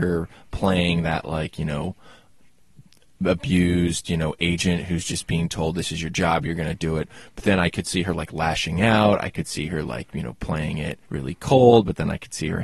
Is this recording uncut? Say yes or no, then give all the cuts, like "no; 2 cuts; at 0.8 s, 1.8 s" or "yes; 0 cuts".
no; 1 cut; at 11.0 s